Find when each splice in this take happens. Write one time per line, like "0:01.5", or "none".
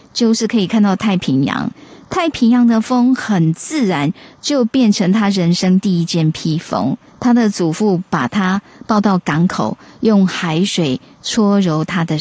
0:07.1